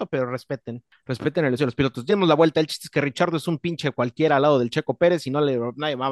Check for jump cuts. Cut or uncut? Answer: cut